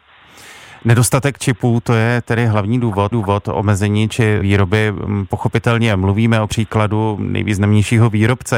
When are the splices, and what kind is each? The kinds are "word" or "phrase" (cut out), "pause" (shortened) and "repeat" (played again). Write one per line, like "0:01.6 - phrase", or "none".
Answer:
0:03.1 - repeat
0:04.4 - word
0:06.5 - word